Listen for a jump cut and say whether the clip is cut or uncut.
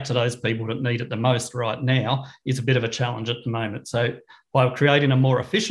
uncut